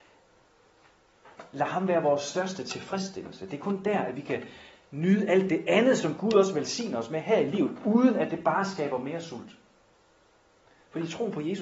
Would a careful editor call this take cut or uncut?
uncut